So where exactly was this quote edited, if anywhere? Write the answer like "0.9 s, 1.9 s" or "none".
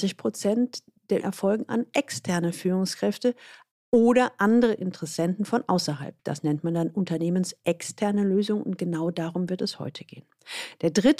1.2 s, 3.7 s